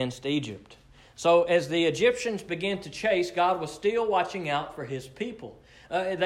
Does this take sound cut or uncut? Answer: uncut